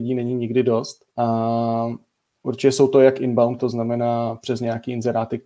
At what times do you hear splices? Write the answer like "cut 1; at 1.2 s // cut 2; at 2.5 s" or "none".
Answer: cut 1; at 1.1 s // cut 2; at 3.6 s